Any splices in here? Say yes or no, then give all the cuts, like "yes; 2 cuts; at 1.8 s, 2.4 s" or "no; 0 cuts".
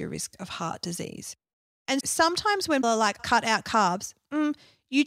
yes; 3 cuts; at 2.0 s, 2.8 s, 3.2 s